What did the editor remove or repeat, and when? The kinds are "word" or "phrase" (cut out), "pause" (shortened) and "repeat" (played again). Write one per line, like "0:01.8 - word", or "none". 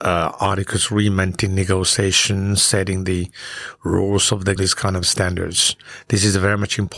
0:04.6 - phrase